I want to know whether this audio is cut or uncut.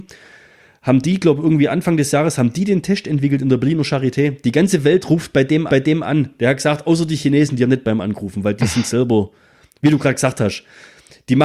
cut